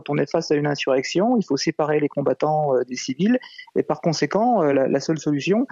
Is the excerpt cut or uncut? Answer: cut